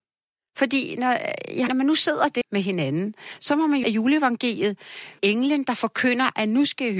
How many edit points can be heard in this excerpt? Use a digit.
4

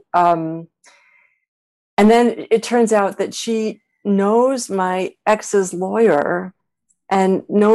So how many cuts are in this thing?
0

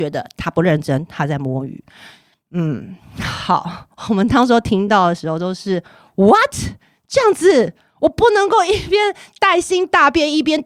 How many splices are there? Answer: 1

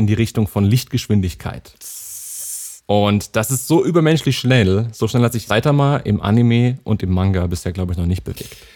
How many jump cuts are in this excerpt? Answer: 1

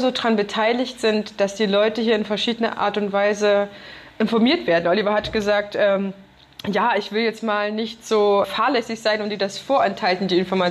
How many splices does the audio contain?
1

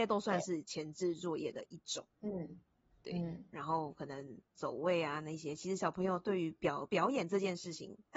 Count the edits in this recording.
2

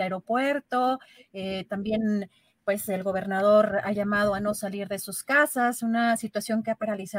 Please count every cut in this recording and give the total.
0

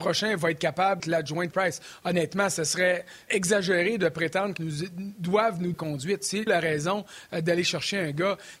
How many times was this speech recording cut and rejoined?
6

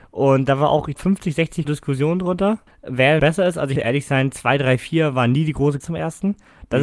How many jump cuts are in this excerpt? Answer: 6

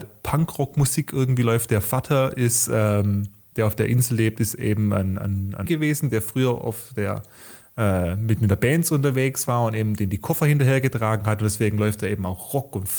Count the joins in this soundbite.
1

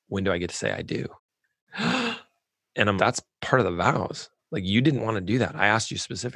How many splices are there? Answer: 3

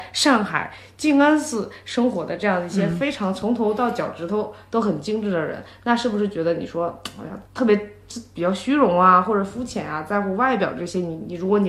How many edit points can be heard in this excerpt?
1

